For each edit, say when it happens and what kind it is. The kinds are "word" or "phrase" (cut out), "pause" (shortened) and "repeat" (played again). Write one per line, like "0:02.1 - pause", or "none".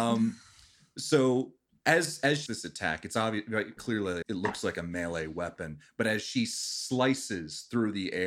0:02.5 - word
0:03.8 - word
0:04.2 - word